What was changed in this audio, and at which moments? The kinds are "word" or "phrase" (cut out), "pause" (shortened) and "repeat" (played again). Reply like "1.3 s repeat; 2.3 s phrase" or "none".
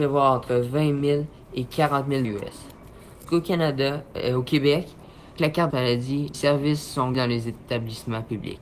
2.2 s word; 3.3 s word; 5.4 s word; 5.7 s word; 6.3 s word; 7.1 s word